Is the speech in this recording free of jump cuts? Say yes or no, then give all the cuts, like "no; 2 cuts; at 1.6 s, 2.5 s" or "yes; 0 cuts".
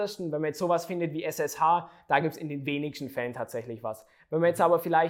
yes; 0 cuts